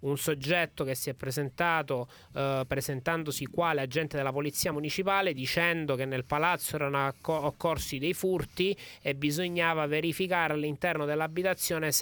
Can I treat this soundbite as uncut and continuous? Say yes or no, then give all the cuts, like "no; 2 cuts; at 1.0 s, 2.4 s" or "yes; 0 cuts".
yes; 0 cuts